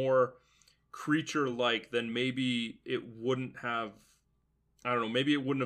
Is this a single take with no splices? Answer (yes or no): yes